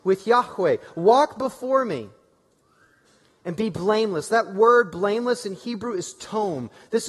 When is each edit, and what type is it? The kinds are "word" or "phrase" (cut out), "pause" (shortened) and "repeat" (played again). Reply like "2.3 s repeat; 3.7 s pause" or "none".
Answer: none